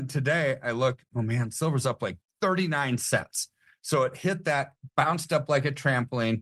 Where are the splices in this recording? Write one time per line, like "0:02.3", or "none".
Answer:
none